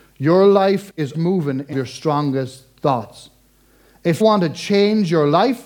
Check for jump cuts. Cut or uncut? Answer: cut